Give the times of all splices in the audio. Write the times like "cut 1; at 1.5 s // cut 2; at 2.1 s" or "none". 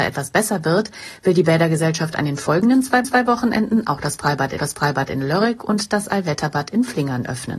cut 1; at 3.0 s // cut 2; at 4.6 s